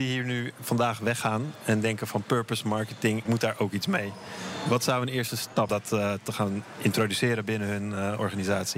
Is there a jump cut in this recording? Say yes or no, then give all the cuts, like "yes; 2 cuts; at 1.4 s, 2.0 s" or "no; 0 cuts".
yes; 2 cuts; at 3.2 s, 5.7 s